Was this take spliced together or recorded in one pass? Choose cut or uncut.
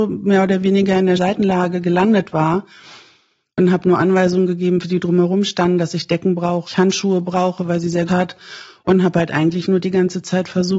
cut